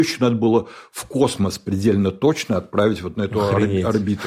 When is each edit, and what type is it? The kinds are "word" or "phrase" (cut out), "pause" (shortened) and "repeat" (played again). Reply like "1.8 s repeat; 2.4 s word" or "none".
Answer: none

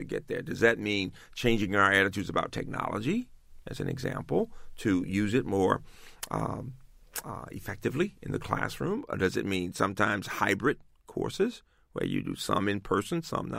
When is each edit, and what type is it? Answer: none

